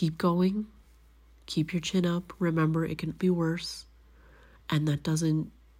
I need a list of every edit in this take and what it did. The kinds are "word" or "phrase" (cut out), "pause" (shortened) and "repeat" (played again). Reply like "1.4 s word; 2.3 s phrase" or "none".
3.2 s word